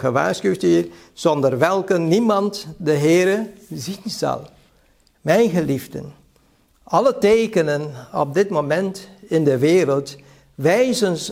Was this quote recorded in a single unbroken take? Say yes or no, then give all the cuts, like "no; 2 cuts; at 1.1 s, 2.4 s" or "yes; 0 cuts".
yes; 0 cuts